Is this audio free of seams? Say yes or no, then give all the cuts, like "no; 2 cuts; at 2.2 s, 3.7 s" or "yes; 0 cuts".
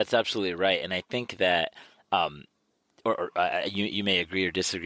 yes; 0 cuts